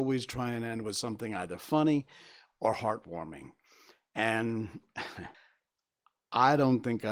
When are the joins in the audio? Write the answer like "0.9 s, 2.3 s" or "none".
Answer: 5.3 s